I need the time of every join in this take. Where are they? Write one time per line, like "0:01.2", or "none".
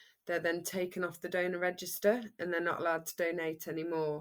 none